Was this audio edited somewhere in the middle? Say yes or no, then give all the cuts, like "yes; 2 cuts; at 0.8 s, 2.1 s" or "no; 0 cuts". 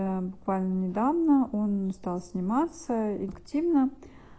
yes; 2 cuts; at 1.9 s, 3.3 s